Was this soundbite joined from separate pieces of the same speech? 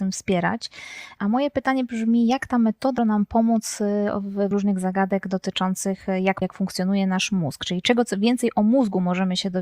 yes; 3 cuts; at 3.0 s, 4.5 s, 6.4 s

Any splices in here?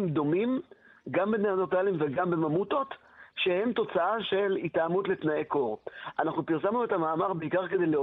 no; 0 cuts

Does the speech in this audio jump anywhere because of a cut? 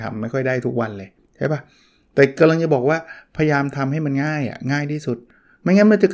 no; 0 cuts

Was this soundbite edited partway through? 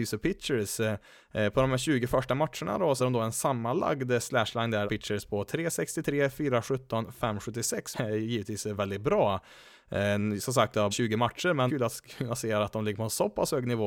yes; 6 cuts; at 3.0 s, 4.9 s, 7.9 s, 8.8 s, 10.9 s, 11.7 s

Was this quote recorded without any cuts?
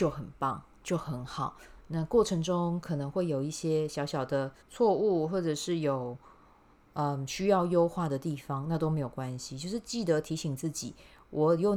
no; 1 cut; at 4.6 s

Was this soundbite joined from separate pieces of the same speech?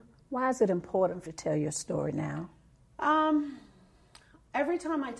yes; 1 cut; at 1.3 s

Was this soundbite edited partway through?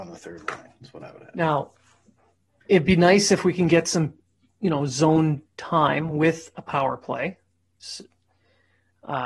no; 0 cuts

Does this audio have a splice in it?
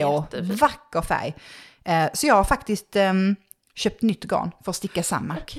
no; 0 cuts

